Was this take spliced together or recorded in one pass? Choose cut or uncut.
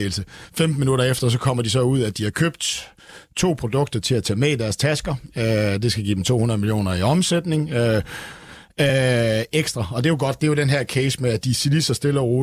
uncut